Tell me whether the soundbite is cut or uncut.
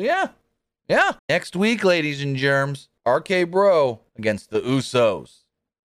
cut